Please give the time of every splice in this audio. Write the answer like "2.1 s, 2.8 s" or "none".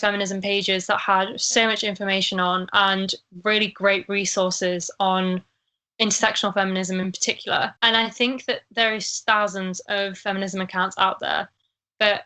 7.8 s